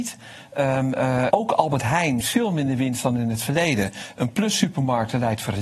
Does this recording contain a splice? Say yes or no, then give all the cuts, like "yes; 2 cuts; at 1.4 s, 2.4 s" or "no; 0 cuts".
yes; 2 cuts; at 1.3 s, 2.2 s